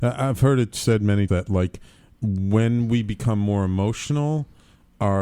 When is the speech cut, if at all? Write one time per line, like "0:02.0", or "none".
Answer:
0:01.3